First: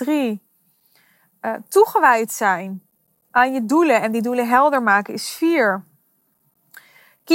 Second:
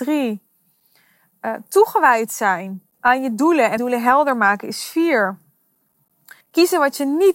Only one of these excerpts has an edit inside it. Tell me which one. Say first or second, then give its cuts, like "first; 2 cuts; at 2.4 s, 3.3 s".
second; 3 cuts; at 2.9 s, 3.8 s, 6.4 s